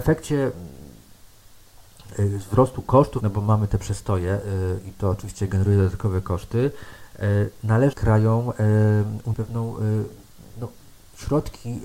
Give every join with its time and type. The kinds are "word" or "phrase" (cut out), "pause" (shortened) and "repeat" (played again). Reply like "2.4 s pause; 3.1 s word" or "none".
3.2 s word; 7.9 s word; 9.3 s word